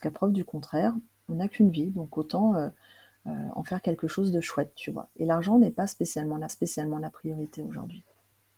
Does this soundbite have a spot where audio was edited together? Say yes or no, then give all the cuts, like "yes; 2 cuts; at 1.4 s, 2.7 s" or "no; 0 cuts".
yes; 1 cut; at 6.5 s